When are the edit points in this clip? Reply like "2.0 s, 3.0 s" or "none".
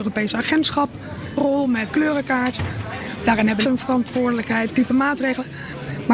1.4 s, 1.9 s, 3.6 s, 4.7 s